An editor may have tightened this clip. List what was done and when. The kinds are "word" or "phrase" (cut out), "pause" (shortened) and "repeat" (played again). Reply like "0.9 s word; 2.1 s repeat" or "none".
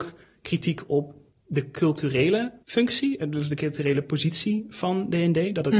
2.6 s pause